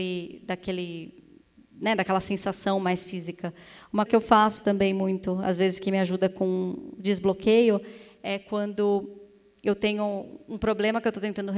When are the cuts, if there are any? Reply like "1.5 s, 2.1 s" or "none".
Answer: 4.1 s